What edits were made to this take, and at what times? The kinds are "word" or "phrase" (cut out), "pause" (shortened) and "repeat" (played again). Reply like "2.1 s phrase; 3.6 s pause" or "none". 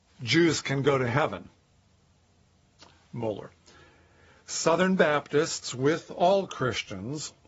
none